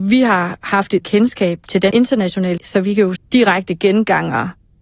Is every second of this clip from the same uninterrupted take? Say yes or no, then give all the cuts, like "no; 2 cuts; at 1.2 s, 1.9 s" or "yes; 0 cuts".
no; 4 cuts; at 1.0 s, 1.9 s, 2.6 s, 3.2 s